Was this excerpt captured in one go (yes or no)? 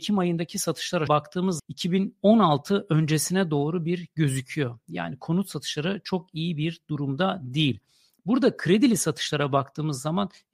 no